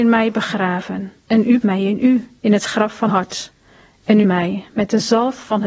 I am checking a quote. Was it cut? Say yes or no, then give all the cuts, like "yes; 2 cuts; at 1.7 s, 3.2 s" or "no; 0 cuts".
yes; 5 cuts; at 1.2 s, 1.6 s, 2.4 s, 3.1 s, 4.2 s